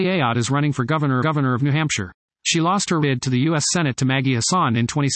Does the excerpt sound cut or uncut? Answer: cut